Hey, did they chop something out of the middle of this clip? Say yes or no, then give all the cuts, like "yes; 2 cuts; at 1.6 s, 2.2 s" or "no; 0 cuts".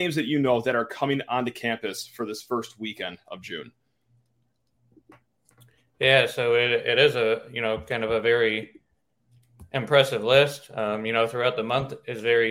no; 0 cuts